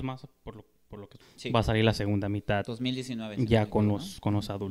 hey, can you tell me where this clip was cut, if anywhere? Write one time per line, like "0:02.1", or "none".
0:01.2